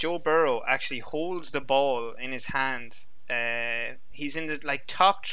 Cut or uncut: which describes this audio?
uncut